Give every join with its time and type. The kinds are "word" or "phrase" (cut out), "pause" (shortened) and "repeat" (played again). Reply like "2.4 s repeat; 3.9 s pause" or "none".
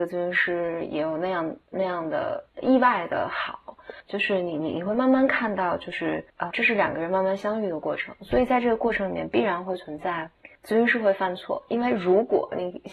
6.5 s word